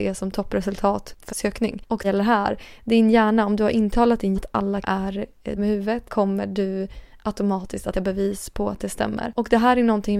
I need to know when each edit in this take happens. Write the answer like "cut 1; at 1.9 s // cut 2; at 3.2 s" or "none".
cut 1; at 1.3 s // cut 2; at 2.0 s // cut 3; at 4.3 s // cut 4; at 4.8 s // cut 5; at 5.6 s // cut 6; at 6.1 s // cut 7; at 7.9 s